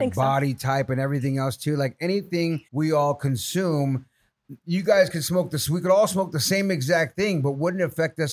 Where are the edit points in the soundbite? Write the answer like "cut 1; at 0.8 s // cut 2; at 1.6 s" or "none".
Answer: cut 1; at 2.7 s